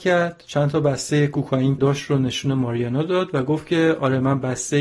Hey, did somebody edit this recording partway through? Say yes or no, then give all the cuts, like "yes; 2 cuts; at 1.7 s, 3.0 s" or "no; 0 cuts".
yes; 1 cut; at 1.8 s